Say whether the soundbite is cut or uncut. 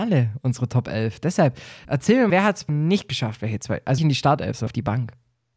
cut